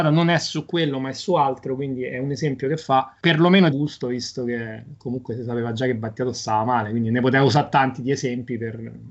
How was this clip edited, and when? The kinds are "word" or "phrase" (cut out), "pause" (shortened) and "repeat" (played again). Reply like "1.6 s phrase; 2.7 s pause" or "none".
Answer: 3.7 s phrase